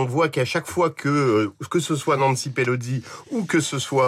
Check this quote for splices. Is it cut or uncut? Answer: uncut